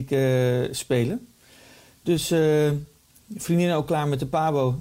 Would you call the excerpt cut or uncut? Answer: uncut